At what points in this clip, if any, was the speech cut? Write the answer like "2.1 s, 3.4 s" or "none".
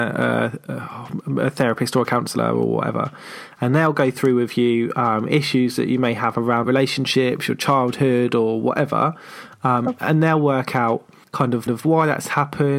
6.6 s, 11.2 s, 11.7 s